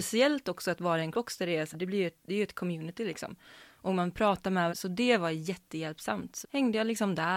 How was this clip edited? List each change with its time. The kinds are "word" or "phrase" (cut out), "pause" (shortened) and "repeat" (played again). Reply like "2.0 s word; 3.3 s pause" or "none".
1.1 s word; 1.7 s word; 4.7 s phrase; 6.4 s word